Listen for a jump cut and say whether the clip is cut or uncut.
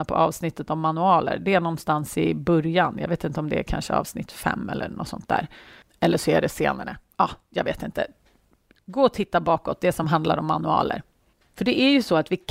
uncut